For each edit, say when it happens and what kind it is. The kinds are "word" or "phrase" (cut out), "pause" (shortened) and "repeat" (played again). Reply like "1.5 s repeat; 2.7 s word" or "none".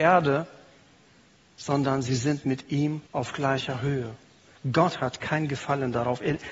3.1 s pause